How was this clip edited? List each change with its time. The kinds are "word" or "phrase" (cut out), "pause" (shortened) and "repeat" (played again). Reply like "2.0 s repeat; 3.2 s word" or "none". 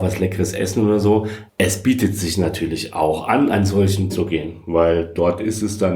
1.5 s pause; 4.1 s phrase